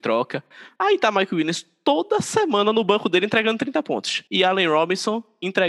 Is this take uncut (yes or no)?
no